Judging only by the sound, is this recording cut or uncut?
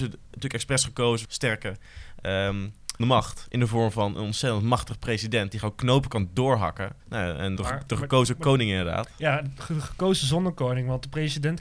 cut